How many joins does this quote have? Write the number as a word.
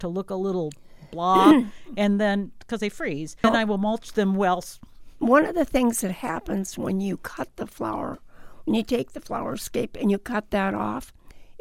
zero